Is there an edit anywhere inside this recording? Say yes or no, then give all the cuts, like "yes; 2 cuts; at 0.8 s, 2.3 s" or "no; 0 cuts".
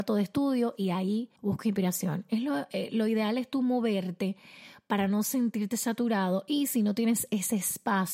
yes; 1 cut; at 1.4 s